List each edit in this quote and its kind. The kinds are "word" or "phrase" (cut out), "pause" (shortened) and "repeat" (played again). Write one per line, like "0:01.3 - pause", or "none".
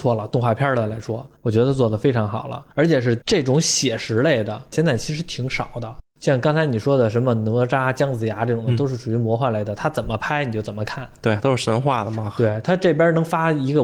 0:01.4 - pause
0:02.7 - pause

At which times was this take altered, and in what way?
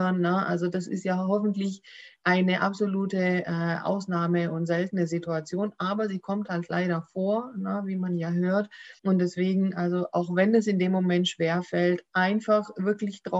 0:09.0 - pause

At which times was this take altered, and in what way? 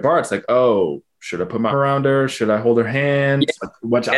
0:01.7 - word

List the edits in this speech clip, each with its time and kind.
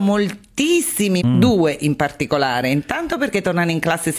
0:01.2 - word

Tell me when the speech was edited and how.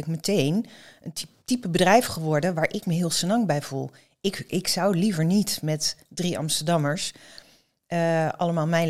0:01.4 - pause

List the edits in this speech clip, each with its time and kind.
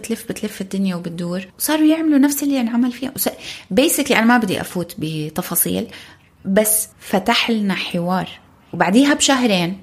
0:01.5 - pause
0:06.9 - pause
0:08.5 - pause

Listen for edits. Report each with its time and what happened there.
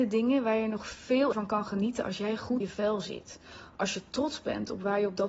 0:01.3 - word
0:02.6 - word

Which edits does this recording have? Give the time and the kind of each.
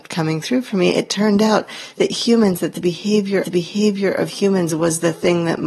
0:03.4 - repeat

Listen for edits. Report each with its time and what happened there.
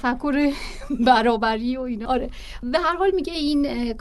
0:02.1 - word

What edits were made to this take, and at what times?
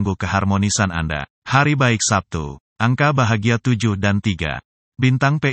0:01.3 - pause

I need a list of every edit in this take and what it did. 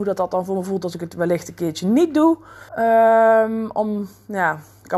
0:02.7 - pause

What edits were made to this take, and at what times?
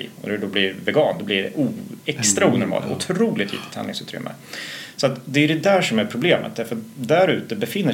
0:02.0 - pause

